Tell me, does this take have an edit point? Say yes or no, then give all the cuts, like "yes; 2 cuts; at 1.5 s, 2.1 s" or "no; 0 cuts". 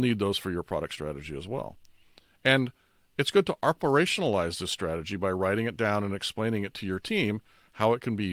no; 0 cuts